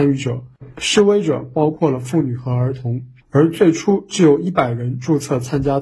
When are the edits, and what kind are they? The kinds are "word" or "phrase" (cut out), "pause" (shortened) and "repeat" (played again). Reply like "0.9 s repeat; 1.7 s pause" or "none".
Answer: 3.2 s pause